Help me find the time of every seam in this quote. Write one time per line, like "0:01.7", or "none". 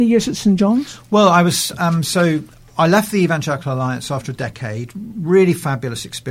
none

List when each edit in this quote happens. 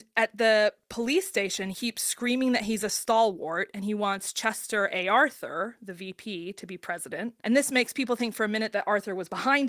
0:01.7
0:07.4

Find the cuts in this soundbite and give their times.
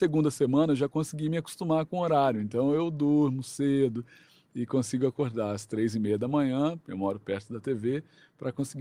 none

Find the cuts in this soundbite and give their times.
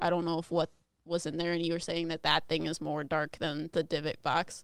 none

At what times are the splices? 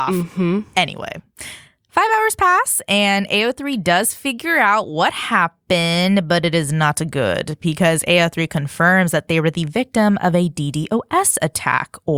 none

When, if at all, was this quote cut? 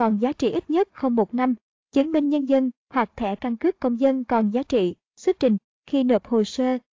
none

